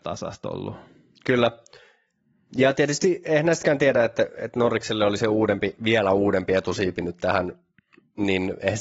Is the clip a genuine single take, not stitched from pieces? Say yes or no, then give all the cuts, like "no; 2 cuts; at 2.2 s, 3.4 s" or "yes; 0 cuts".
yes; 0 cuts